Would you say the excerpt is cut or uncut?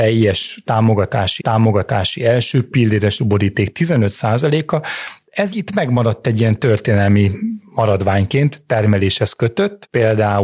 cut